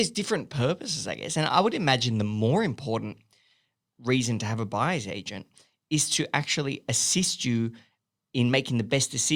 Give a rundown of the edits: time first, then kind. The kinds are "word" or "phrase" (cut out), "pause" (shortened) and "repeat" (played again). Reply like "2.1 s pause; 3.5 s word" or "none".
none

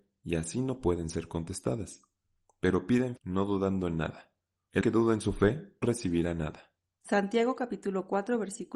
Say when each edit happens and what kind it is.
3.2 s word; 4.8 s word; 5.8 s word

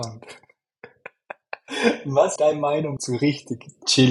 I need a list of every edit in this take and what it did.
2.4 s word; 3.0 s word

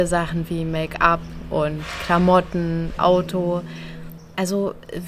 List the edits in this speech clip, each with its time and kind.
3.0 s phrase

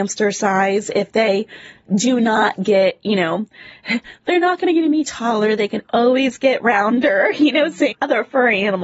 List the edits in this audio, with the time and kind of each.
7.9 s phrase

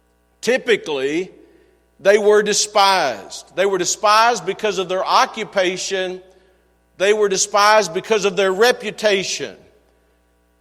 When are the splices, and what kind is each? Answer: none

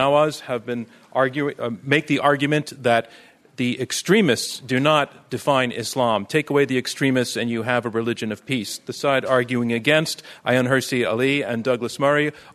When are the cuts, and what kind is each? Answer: none

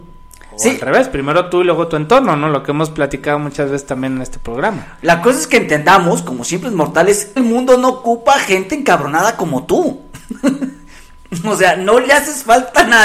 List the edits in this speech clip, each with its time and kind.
7.4 s phrase

